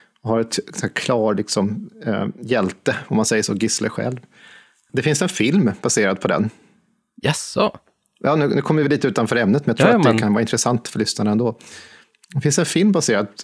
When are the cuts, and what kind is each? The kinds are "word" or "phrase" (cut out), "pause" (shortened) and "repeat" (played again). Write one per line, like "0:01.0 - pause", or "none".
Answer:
none